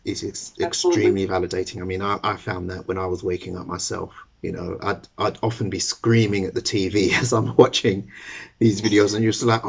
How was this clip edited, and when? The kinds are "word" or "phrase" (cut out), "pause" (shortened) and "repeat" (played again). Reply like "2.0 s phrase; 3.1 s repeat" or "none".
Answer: 4.3 s pause